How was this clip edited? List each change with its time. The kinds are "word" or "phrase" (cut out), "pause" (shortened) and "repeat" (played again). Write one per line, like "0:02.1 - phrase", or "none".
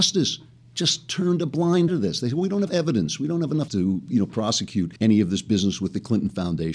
0:01.9 - word
0:02.7 - word
0:03.7 - word
0:05.0 - pause